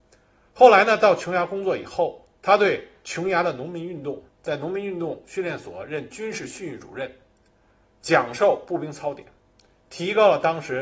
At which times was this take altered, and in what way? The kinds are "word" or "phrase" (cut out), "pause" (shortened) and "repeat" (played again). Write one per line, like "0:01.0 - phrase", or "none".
0:02.3 - pause
0:04.3 - pause